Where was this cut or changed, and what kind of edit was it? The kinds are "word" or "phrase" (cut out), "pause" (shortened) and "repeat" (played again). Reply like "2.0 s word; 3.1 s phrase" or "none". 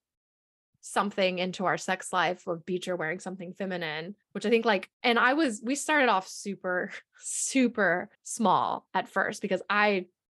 4.2 s pause; 4.9 s pause; 8.1 s pause